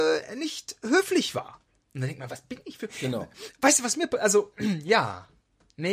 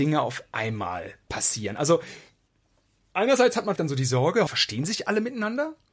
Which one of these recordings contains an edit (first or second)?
second